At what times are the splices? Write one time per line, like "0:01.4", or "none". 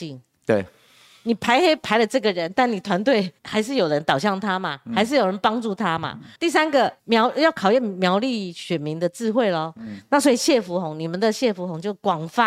0:03.4
0:06.4
0:07.0